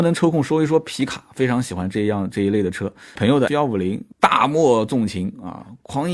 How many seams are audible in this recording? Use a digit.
3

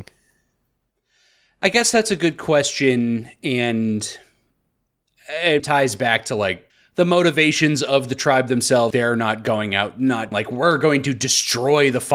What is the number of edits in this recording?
4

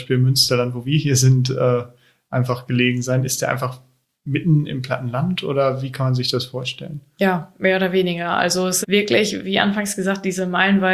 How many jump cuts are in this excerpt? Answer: 1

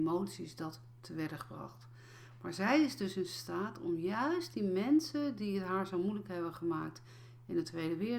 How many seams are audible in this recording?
0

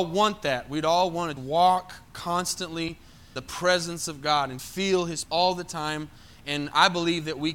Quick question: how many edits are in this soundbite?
4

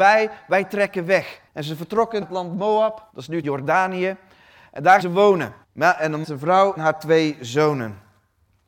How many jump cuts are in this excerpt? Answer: 8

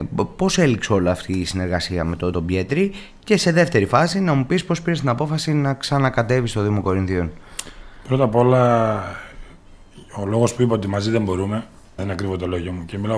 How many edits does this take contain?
2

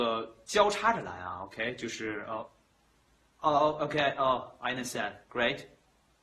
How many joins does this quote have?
0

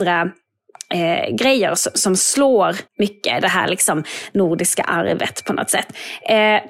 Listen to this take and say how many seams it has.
1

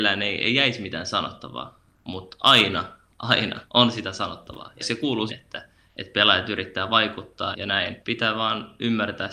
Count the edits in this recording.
5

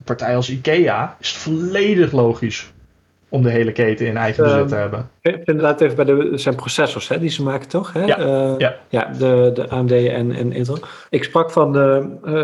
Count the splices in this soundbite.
3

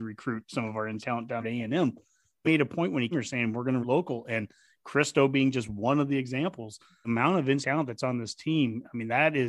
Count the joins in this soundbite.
7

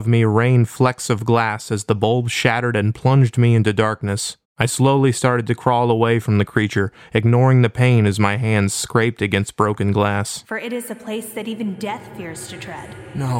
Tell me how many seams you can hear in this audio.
1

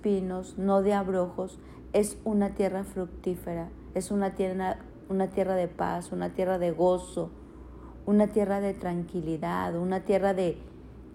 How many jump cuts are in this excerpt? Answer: 0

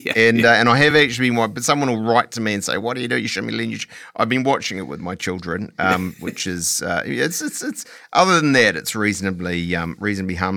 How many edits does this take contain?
0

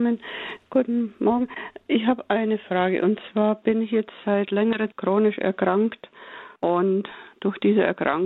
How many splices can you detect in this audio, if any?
2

